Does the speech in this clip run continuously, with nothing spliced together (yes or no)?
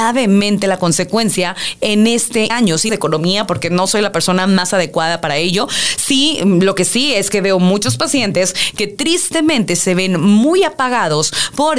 no